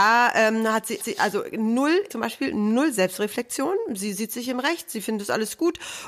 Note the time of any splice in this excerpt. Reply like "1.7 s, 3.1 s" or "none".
1.0 s, 2.1 s